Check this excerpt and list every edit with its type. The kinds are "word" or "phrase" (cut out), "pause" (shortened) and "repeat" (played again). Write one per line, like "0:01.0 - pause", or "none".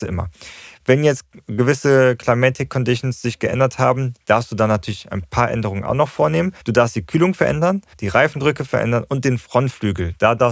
0:06.6 - pause
0:07.9 - pause